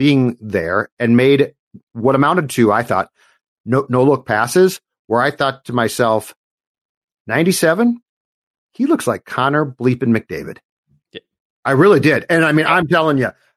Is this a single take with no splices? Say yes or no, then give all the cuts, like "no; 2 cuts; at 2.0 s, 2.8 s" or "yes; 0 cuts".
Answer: yes; 0 cuts